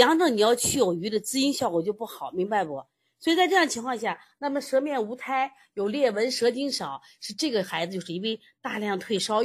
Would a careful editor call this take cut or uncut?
uncut